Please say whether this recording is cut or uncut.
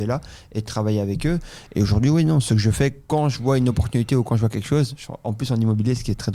uncut